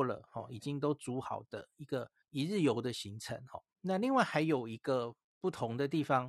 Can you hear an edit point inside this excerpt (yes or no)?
yes